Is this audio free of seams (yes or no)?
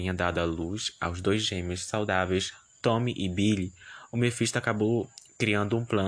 yes